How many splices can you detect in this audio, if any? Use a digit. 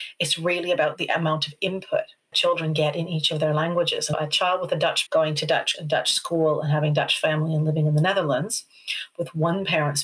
4